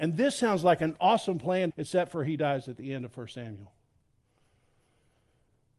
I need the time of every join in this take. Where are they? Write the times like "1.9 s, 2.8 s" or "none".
1.7 s